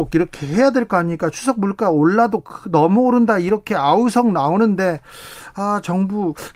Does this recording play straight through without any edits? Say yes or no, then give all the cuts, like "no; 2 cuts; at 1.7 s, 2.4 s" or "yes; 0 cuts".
yes; 0 cuts